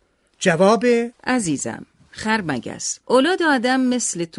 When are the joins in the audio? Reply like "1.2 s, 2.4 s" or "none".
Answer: 1.1 s, 3.0 s